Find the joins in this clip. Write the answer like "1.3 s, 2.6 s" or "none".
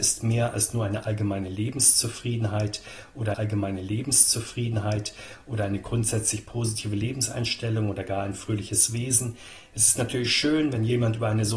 3.3 s